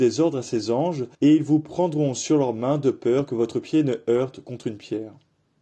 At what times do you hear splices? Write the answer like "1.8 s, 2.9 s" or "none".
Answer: 1.1 s